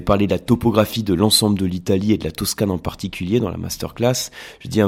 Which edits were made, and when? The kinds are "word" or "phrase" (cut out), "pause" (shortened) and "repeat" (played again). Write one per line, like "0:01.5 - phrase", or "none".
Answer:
none